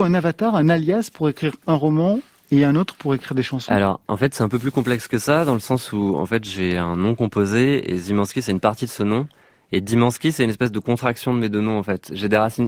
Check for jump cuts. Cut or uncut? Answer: uncut